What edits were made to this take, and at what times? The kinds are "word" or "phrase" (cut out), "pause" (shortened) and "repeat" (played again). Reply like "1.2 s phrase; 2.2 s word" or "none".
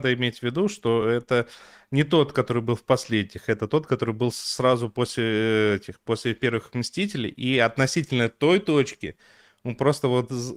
none